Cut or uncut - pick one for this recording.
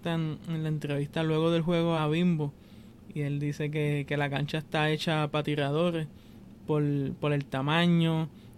cut